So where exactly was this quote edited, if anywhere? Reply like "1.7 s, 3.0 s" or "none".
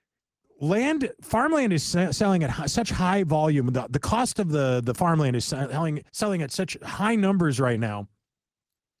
6.1 s